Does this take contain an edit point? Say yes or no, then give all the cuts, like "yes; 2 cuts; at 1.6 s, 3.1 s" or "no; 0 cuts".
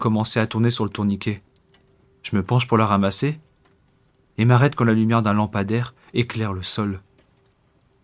no; 0 cuts